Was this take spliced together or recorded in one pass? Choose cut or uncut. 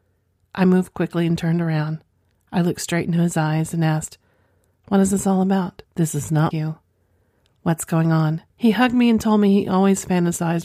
cut